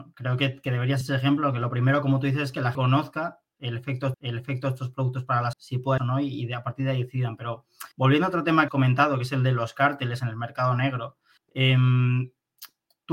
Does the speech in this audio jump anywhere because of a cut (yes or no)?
yes